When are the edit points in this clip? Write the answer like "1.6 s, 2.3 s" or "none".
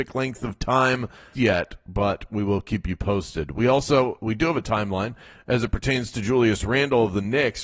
1.3 s